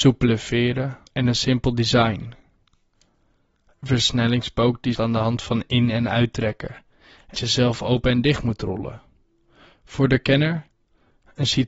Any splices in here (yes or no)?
yes